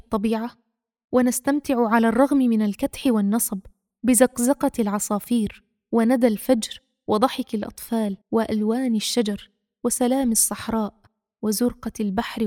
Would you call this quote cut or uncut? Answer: cut